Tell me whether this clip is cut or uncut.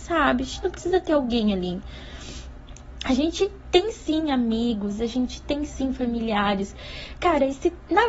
uncut